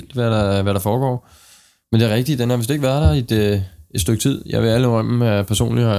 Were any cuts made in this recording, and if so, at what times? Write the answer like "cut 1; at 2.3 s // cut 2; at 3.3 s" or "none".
none